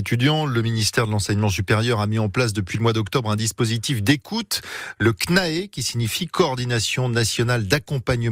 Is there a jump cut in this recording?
no; 0 cuts

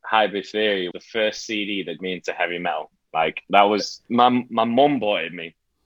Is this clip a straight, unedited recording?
no; 3 cuts; at 0.9 s, 2.0 s, 4.0 s

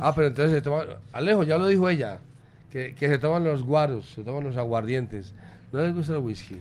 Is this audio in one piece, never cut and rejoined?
yes; 0 cuts

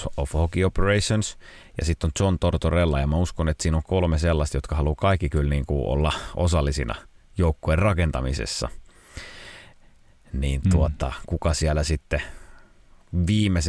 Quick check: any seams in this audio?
no; 0 cuts

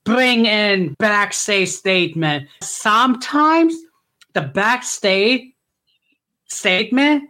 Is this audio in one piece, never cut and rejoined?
no; 2 cuts; at 0.9 s, 2.6 s

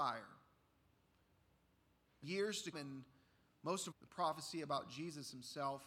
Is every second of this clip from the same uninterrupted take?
no; 3 cuts; at 2.2 s, 2.7 s, 3.9 s

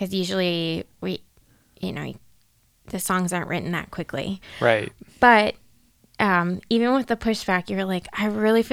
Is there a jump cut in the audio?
no; 0 cuts

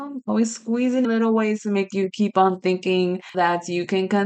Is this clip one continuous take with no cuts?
no; 2 cuts; at 1.0 s, 3.3 s

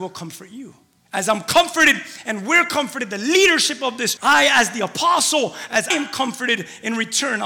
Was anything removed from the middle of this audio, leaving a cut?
yes; 3 cuts; at 1.0 s, 4.2 s, 5.9 s

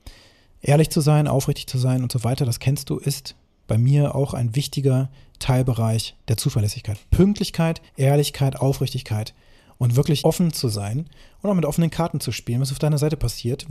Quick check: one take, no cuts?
no; 2 cuts; at 7.9 s, 10.2 s

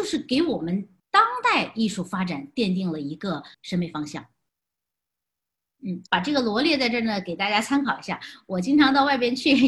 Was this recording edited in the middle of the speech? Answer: yes; 3 cuts; at 1.0 s, 3.5 s, 6.1 s

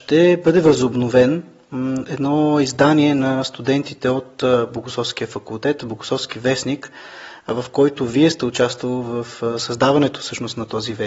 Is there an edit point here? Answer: no; 0 cuts

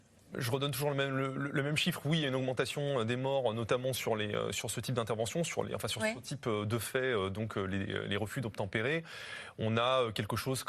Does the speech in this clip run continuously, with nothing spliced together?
yes; 0 cuts

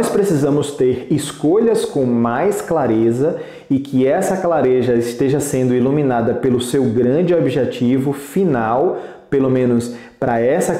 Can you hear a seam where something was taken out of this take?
no; 0 cuts

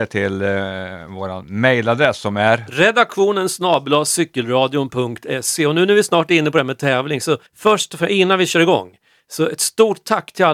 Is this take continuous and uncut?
no; 1 cut; at 7.5 s

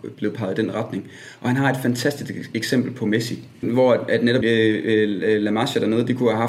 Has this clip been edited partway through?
yes; 2 cuts; at 3.6 s, 4.4 s

